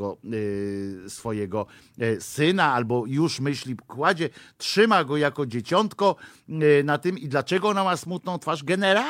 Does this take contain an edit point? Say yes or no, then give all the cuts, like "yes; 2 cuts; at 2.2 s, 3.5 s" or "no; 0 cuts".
no; 0 cuts